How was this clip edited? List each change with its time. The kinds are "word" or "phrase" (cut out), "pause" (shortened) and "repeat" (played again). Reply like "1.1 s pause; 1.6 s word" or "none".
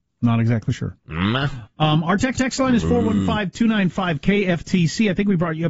2.3 s repeat